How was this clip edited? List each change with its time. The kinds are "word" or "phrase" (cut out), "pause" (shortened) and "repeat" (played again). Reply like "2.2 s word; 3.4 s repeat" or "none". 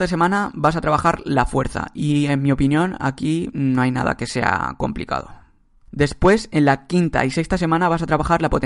none